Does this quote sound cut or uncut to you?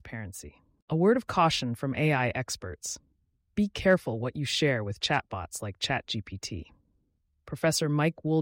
uncut